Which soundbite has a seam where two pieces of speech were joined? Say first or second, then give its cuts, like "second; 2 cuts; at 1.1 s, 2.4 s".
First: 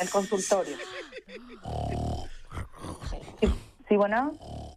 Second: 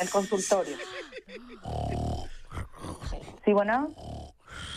second; 1 cut; at 3.4 s